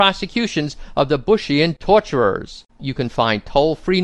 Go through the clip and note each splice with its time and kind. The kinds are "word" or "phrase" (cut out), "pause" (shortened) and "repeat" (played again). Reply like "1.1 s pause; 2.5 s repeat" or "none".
2.7 s pause